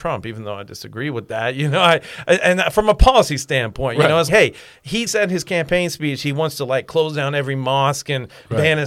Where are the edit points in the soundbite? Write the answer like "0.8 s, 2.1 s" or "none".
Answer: 4.3 s, 5.1 s